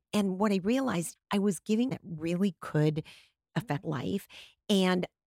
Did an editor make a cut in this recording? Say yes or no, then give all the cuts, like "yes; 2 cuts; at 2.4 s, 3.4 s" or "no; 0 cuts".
yes; 3 cuts; at 1.2 s, 1.9 s, 3.8 s